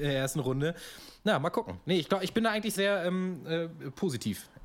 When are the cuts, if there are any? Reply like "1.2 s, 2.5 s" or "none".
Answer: 2.8 s